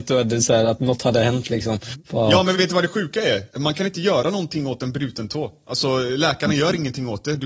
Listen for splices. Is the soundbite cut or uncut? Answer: cut